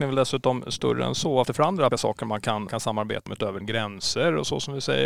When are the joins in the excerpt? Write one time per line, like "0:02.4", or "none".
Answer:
0:01.4
0:01.9
0:02.7
0:03.3
0:03.6